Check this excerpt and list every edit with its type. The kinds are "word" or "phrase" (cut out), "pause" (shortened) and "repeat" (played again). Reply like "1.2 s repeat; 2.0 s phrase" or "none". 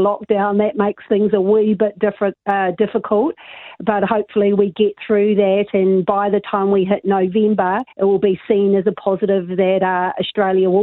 7.9 s pause